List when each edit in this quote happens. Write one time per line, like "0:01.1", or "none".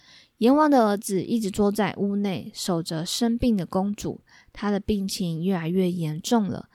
none